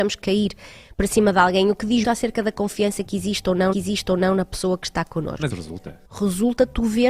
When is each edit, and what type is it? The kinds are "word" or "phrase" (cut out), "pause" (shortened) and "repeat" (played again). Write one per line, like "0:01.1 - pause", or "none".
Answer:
0:02.0 - word
0:03.7 - repeat
0:05.5 - word
0:06.0 - pause